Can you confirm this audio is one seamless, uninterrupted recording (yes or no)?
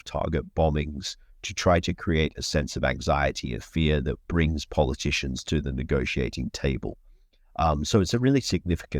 yes